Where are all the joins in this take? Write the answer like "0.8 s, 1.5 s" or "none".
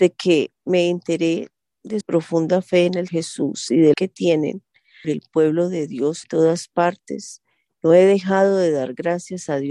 2.0 s, 3.1 s, 3.9 s, 5.0 s, 6.2 s

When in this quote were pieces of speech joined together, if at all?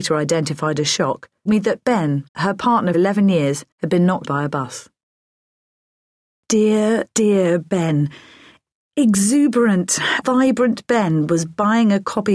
1.5 s, 2.3 s, 2.9 s, 3.7 s, 4.2 s, 7.1 s, 10.2 s

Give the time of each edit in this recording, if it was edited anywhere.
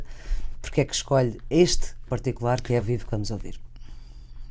2.1 s, 2.8 s

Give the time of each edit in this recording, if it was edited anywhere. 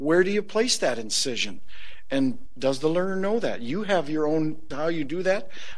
4.7 s

